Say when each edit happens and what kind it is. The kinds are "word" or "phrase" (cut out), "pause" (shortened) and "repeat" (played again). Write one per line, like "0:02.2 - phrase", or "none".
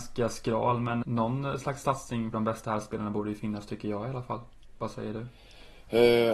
0:01.0 - word
0:02.3 - phrase